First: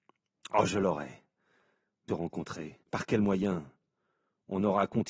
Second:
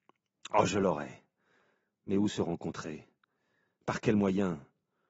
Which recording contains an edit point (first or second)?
first